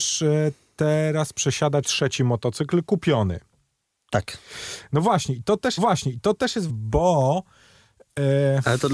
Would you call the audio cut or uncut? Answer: cut